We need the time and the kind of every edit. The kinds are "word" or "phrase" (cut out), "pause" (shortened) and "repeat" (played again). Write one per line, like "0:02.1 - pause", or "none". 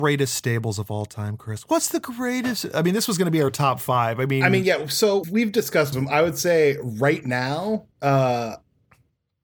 0:05.2 - word
0:05.9 - word
0:07.9 - pause